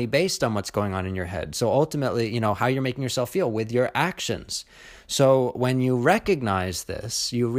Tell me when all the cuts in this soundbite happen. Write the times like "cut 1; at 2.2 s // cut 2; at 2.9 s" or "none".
none

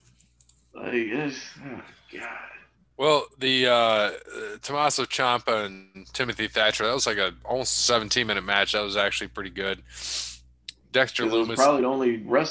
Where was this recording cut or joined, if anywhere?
none

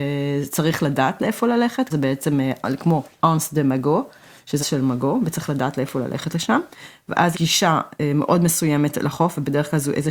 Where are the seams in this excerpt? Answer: cut 1; at 1.9 s // cut 2; at 4.6 s // cut 3; at 7.3 s

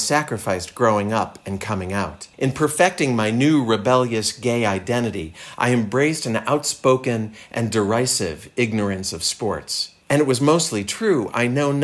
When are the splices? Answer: cut 1; at 2.3 s // cut 2; at 10.0 s

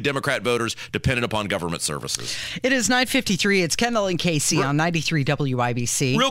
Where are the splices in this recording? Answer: none

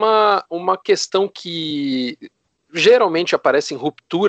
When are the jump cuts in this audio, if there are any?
none

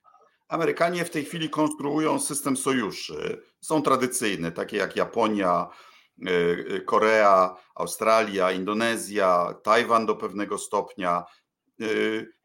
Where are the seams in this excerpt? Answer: none

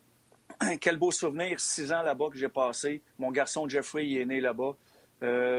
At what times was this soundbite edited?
cut 1; at 3.1 s

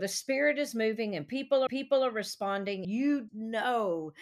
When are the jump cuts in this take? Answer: cut 1; at 1.7 s // cut 2; at 2.8 s // cut 3; at 3.3 s

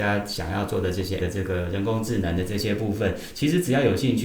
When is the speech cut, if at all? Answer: cut 1; at 1.2 s

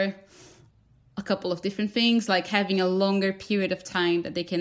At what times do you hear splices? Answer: none

